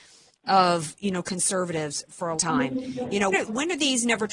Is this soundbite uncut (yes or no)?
no